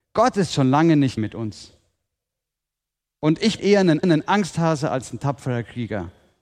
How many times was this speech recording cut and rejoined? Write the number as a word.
three